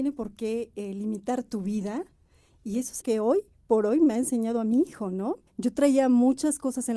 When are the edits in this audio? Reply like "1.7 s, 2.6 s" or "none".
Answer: 3.0 s, 4.7 s, 5.5 s